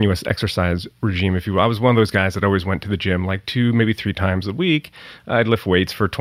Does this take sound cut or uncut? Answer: uncut